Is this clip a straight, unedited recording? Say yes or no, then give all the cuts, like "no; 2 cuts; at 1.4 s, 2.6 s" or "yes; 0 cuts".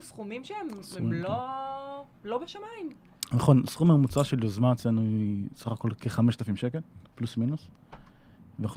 yes; 0 cuts